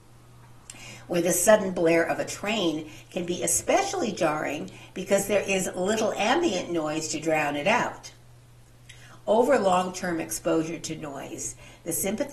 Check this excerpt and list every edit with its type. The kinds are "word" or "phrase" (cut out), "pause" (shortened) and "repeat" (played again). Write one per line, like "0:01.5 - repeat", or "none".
none